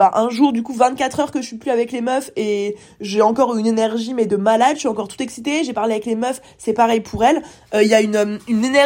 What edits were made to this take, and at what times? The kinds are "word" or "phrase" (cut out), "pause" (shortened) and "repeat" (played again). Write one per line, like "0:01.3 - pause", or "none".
none